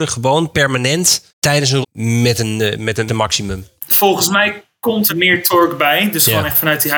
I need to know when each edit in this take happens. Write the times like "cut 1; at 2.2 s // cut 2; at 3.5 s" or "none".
cut 1; at 1.3 s // cut 2; at 1.8 s // cut 3; at 3.1 s // cut 4; at 5.1 s